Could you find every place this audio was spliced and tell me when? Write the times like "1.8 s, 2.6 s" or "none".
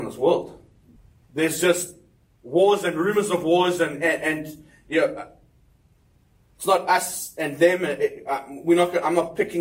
1.0 s